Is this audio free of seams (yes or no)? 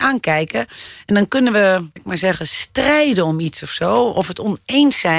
no